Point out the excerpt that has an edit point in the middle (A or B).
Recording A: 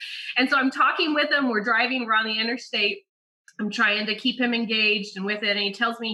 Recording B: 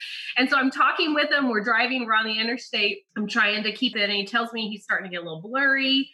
B